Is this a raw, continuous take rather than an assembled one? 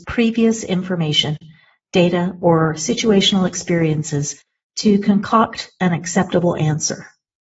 yes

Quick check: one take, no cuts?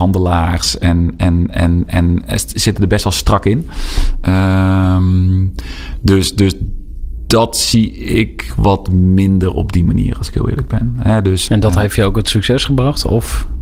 no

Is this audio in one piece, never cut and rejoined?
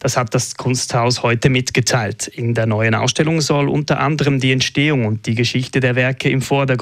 yes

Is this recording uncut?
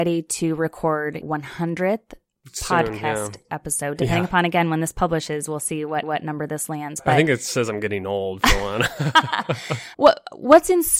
no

